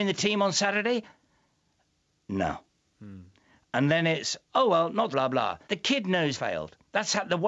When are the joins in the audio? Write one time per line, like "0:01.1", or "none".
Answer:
0:02.7
0:04.4
0:05.1
0:05.6
0:06.3